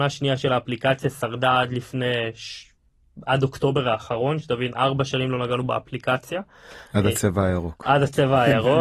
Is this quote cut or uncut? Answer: uncut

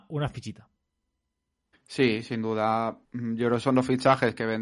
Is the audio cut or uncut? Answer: cut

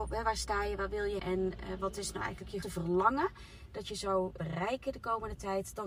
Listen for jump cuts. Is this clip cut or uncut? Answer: cut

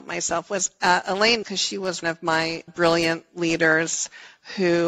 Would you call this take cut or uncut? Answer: cut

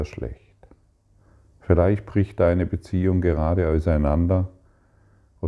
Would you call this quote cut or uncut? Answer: uncut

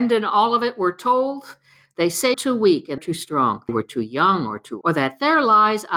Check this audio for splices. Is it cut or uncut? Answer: cut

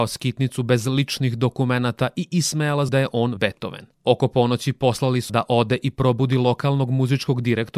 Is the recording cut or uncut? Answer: cut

